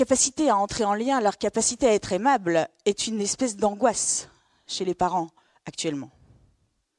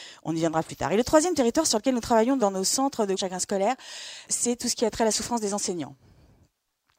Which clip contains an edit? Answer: second; 2 cuts; at 2.4 s, 3.2 s

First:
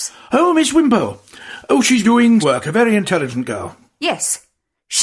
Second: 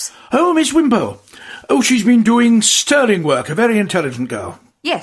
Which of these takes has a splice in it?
first; 2 cuts; at 2.0 s, 2.4 s

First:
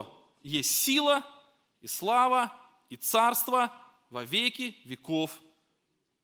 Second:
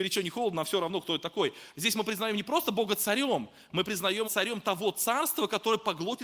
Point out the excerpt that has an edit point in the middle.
second; 1 cut; at 4.2 s

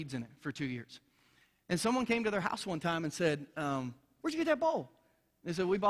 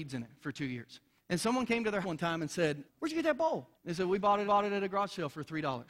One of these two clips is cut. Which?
second; 5 cuts; at 1.2 s, 2.0 s, 2.9 s, 3.7 s, 4.4 s

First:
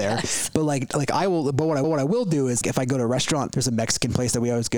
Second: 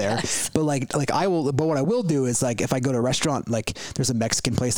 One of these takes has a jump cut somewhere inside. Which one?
first; 3 cuts; at 1.8 s, 2.6 s, 3.5 s

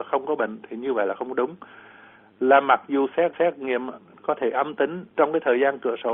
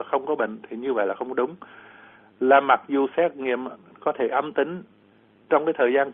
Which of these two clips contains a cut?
first; 2 cuts; at 3.3 s, 5.1 s

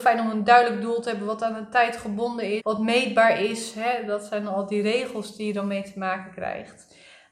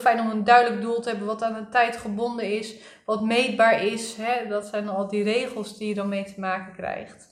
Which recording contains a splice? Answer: first; 1 cut; at 2.6 s

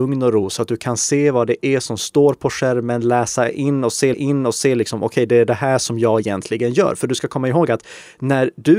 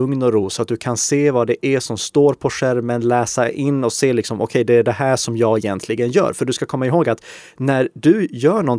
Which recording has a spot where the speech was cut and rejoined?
first; 1 cut; at 4.1 s

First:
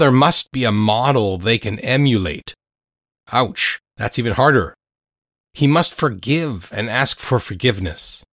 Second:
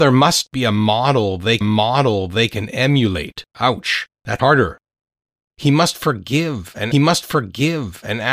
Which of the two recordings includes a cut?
second; 4 cuts; at 1.6 s, 3.5 s, 4.4 s, 6.9 s

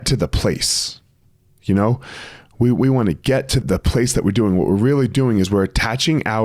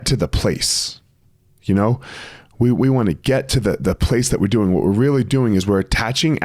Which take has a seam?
first; 1 cut; at 3.6 s

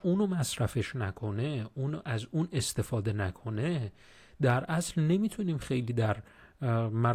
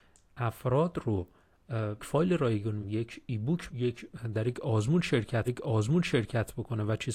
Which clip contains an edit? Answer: second; 4 cuts; at 2.0 s, 2.8 s, 3.7 s, 5.5 s

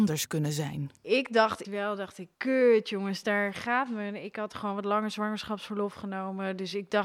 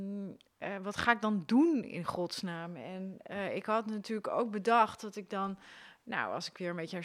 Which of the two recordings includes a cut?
first; 3 cuts; at 1.0 s, 1.6 s, 2.3 s

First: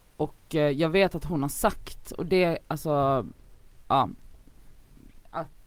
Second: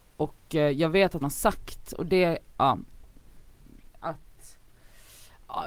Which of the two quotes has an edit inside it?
second; 2 cuts; at 1.2 s, 2.5 s

